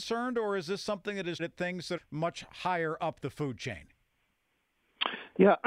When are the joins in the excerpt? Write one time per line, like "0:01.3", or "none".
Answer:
0:01.4
0:02.0